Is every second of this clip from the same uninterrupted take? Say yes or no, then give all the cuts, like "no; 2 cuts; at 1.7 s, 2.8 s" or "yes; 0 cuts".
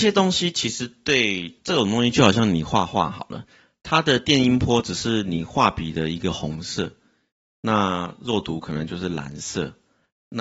yes; 0 cuts